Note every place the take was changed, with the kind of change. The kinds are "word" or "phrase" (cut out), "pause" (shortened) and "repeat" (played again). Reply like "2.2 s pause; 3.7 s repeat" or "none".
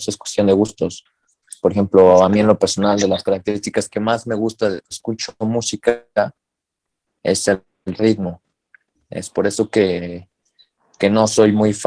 4.9 s word